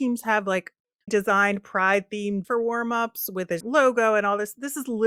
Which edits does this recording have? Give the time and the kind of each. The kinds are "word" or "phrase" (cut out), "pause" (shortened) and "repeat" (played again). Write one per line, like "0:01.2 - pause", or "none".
0:01.1 - word
0:02.4 - word
0:03.6 - word